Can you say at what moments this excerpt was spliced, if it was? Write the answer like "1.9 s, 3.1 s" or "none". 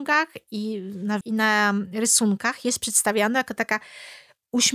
1.2 s